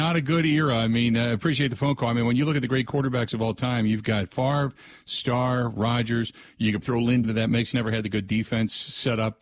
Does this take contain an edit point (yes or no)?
yes